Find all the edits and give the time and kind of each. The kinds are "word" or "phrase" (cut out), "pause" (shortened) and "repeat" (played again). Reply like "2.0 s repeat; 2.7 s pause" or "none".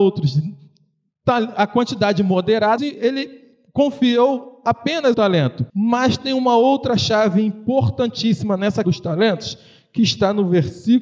2.8 s phrase; 5.1 s word; 5.7 s pause; 8.8 s word